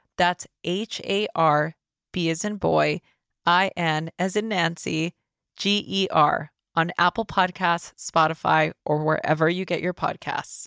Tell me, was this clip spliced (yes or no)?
no